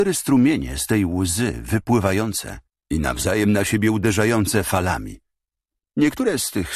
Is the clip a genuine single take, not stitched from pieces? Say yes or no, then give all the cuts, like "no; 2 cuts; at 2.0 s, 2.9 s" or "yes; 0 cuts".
no; 1 cut; at 2.7 s